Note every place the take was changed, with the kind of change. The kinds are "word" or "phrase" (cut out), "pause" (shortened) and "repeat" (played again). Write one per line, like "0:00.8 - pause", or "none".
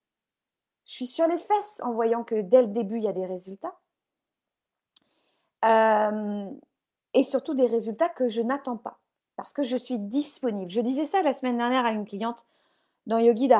none